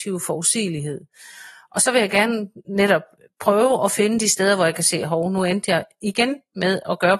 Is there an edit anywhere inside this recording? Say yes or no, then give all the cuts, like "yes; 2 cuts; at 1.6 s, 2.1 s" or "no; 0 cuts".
no; 0 cuts